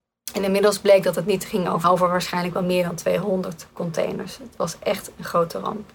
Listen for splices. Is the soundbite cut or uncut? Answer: cut